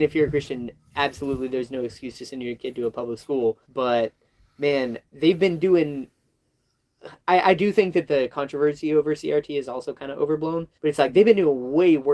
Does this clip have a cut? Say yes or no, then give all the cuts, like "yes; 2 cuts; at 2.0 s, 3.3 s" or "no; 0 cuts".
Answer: yes; 3 cuts; at 3.6 s, 7.2 s, 10.8 s